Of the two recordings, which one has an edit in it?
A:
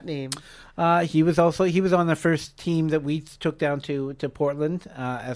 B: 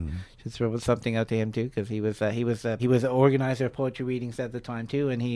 B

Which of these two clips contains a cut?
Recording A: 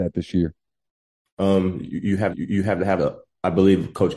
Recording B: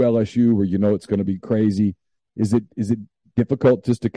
A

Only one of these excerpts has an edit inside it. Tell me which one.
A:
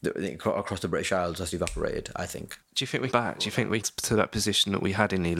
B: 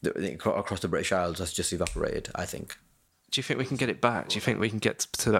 A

